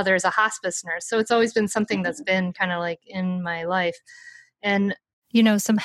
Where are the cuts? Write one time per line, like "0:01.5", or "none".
none